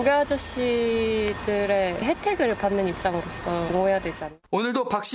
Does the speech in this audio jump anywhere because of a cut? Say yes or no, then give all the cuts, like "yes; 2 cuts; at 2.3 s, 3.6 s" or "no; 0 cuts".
no; 0 cuts